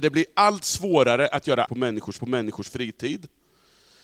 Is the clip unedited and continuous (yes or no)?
no